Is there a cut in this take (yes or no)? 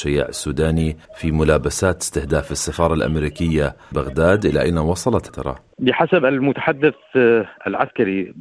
yes